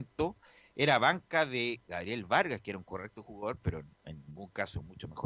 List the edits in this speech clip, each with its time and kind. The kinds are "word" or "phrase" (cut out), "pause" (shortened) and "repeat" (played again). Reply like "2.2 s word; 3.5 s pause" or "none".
3.9 s pause